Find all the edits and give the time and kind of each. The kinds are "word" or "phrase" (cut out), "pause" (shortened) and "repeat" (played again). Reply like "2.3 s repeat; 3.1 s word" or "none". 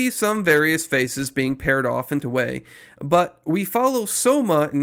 2.2 s word